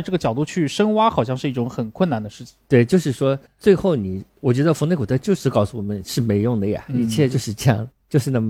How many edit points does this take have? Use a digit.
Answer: 1